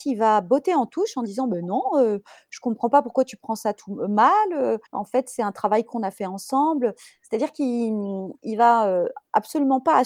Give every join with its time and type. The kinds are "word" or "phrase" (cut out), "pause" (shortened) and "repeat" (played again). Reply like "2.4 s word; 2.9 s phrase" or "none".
4.9 s pause